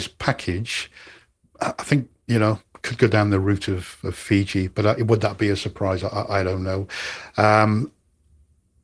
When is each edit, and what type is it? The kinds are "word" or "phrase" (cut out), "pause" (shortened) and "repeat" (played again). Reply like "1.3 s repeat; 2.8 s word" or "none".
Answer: none